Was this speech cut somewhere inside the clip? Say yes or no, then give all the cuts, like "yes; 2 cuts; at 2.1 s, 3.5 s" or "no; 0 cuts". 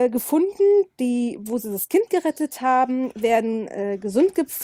no; 0 cuts